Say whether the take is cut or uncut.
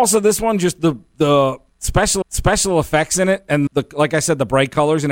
cut